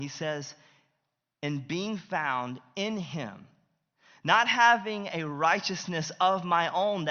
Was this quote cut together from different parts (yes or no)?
no